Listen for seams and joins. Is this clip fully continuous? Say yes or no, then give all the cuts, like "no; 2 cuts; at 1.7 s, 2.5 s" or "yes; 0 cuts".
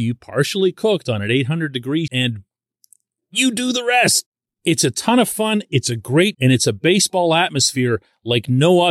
no; 3 cuts; at 2.1 s, 4.5 s, 6.3 s